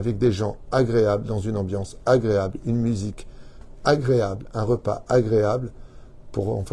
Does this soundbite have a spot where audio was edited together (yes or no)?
no